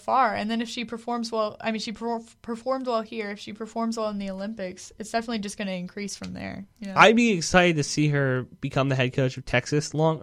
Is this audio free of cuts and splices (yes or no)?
yes